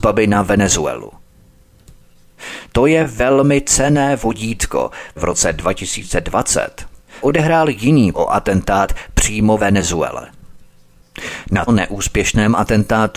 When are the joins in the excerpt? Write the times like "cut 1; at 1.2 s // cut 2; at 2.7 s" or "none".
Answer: cut 1; at 5.2 s // cut 2; at 7.2 s // cut 3; at 8.1 s // cut 4; at 9.6 s // cut 5; at 11.7 s